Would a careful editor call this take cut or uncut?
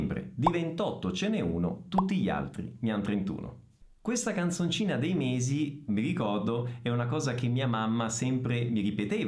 uncut